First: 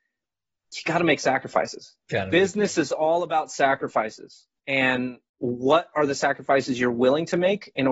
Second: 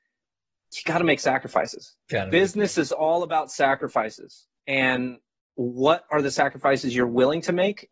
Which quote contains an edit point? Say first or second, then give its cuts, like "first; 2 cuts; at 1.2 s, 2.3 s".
first; 1 cut; at 5.3 s